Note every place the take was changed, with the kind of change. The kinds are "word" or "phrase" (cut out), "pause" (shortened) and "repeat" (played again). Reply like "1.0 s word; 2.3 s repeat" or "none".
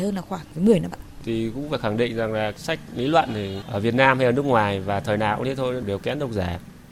0.9 s word